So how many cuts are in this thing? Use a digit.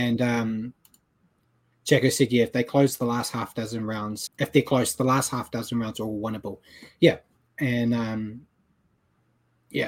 1